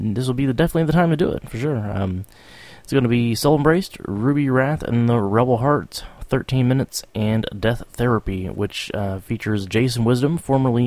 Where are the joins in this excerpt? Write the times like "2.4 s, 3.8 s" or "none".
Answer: none